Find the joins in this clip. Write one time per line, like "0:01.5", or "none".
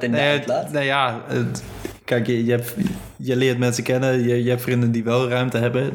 none